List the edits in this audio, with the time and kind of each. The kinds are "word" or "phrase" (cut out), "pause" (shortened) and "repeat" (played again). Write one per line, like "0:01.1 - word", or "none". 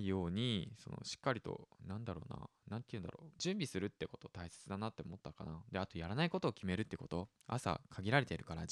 0:03.4 - phrase